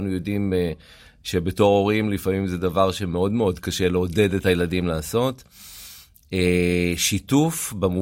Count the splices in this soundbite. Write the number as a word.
zero